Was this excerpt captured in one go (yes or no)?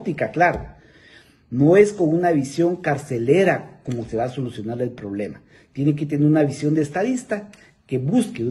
yes